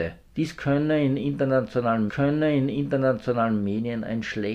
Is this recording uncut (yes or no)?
no